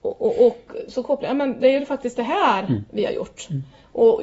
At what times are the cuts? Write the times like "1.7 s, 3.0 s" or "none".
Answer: none